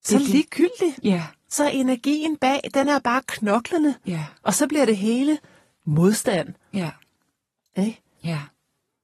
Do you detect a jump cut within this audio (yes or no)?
no